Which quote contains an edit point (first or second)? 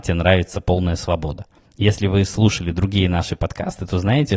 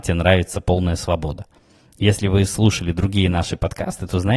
first